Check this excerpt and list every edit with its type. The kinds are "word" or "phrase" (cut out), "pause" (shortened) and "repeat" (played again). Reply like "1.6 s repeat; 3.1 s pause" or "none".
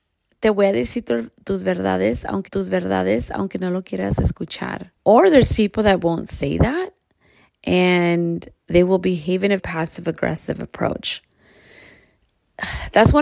2.5 s repeat; 5.0 s pause; 8.6 s pause; 9.6 s word